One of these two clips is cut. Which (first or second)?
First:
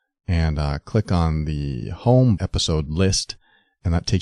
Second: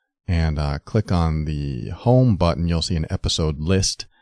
first